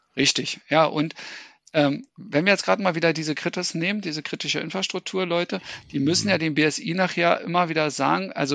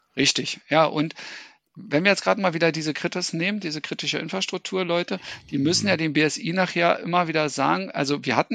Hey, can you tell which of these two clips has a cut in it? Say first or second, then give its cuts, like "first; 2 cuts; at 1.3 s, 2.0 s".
second; 1 cut; at 1.7 s